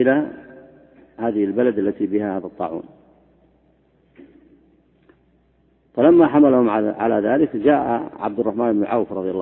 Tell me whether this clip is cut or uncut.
uncut